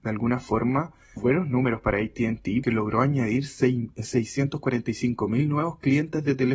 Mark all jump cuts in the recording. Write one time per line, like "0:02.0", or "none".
0:01.2
0:02.6